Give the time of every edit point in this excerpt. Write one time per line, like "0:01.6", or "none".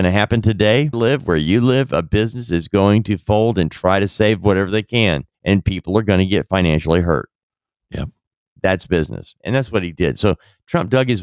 0:00.9
0:05.3